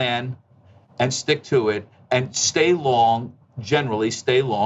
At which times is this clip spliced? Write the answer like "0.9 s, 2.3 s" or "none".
none